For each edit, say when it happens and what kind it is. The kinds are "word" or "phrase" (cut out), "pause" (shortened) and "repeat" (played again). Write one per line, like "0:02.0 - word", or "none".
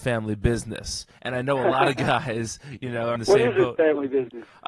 0:01.1 - pause
0:03.2 - word